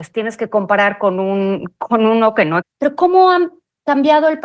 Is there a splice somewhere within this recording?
yes; 1 cut; at 2.6 s

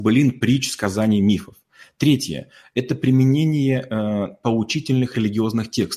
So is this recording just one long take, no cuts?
yes; 0 cuts

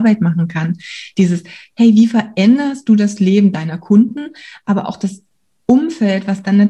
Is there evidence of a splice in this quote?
no; 0 cuts

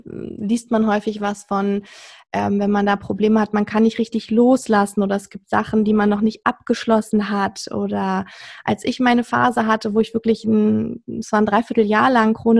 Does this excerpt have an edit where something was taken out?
no; 0 cuts

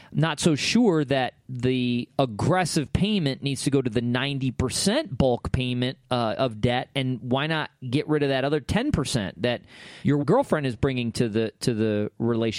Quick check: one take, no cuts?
yes; 0 cuts

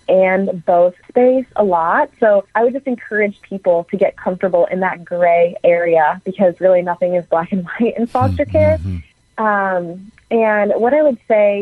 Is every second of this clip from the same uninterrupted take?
no; 3 cuts; at 1.0 s, 2.5 s, 9.1 s

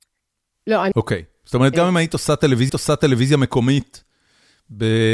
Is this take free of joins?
no; 2 cuts; at 1.7 s, 2.7 s

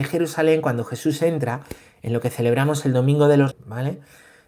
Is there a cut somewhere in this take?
yes; 1 cut; at 3.5 s

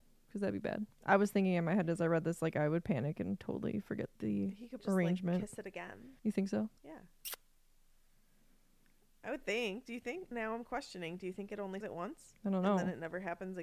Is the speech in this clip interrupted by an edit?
yes; 6 cuts; at 0.9 s, 4.8 s, 6.2 s, 6.8 s, 10.3 s, 11.8 s

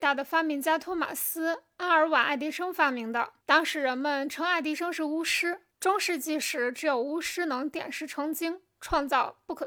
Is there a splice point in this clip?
yes; 2 cuts; at 3.4 s, 5.7 s

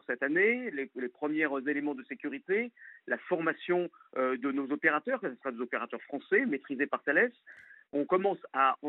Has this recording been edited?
no; 0 cuts

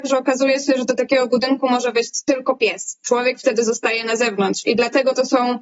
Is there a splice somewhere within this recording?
no; 0 cuts

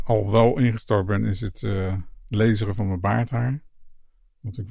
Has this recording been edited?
no; 0 cuts

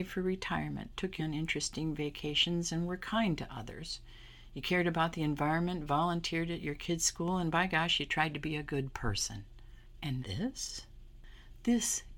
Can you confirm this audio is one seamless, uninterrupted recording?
no; 2 cuts; at 1.2 s, 10.2 s

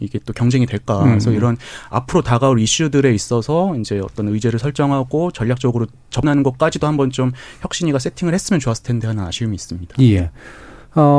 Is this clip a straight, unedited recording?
yes; 0 cuts

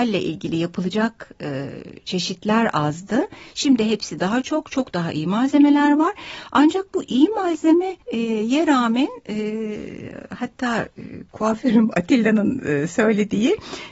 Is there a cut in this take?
yes; 1 cut; at 8.0 s

